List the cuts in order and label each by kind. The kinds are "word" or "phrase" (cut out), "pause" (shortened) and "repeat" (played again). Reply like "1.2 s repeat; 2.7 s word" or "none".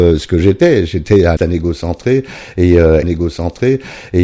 1.4 s word; 3.0 s repeat